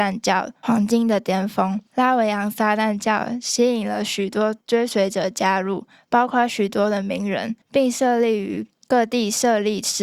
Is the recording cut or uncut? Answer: cut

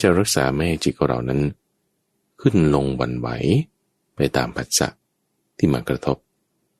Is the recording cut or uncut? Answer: uncut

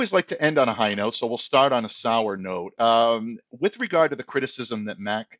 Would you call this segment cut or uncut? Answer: uncut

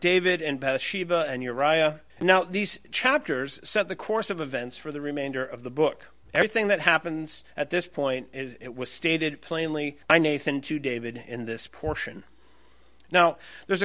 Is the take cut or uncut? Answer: cut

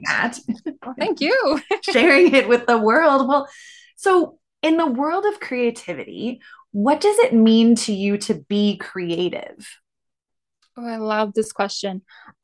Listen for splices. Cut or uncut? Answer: uncut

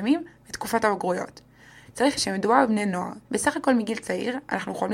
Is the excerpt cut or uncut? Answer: cut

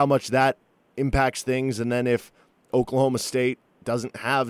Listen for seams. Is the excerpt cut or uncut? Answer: uncut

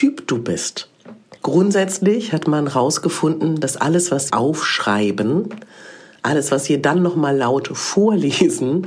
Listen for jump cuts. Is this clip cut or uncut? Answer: cut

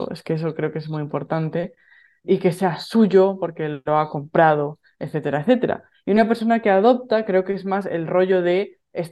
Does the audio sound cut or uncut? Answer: cut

